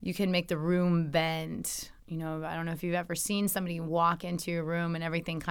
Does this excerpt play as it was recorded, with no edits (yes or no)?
no